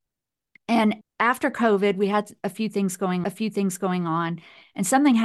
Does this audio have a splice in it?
yes; 2 cuts; at 1.0 s, 3.2 s

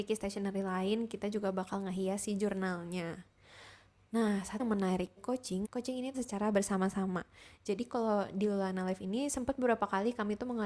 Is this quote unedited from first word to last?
no; 4 cuts; at 4.6 s, 5.2 s, 5.6 s, 6.1 s

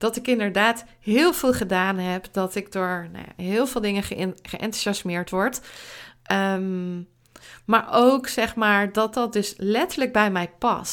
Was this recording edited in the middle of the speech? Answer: no; 0 cuts

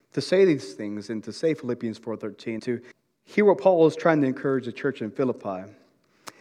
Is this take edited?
yes; 2 cuts; at 2.6 s, 2.9 s

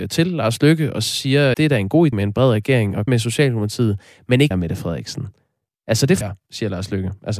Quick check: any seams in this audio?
yes; 5 cuts; at 1.5 s, 2.1 s, 3.1 s, 4.5 s, 6.2 s

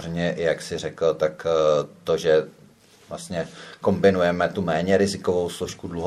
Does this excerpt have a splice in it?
no; 0 cuts

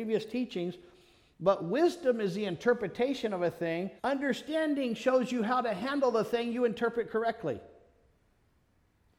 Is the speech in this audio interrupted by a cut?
yes; 1 cut; at 4.0 s

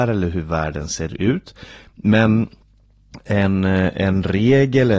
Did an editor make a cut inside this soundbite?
no; 0 cuts

